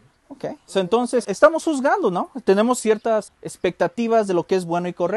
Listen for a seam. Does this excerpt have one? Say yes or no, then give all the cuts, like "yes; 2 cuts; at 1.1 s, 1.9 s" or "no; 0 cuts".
yes; 2 cuts; at 1.2 s, 3.3 s